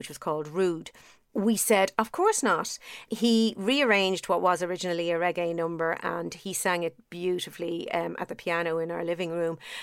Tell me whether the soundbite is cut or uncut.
uncut